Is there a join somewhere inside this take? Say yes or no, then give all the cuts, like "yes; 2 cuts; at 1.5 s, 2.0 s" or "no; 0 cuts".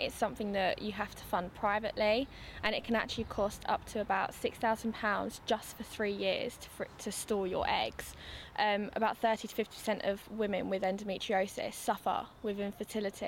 no; 0 cuts